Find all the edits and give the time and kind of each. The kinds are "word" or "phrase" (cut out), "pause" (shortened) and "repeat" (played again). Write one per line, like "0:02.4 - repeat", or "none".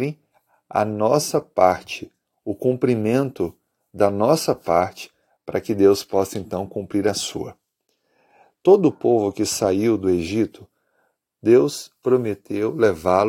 none